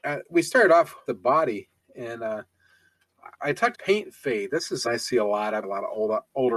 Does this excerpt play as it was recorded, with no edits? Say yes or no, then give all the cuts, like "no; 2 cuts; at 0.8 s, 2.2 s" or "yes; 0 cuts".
no; 5 cuts; at 1.1 s, 3.3 s, 3.7 s, 4.8 s, 5.6 s